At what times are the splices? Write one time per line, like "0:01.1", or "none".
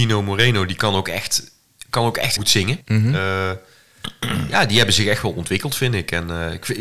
0:02.4
0:02.8